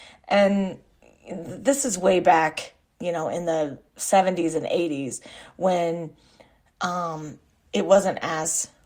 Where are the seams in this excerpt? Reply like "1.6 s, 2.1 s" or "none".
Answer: none